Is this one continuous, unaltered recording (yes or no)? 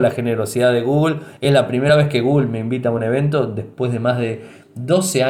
yes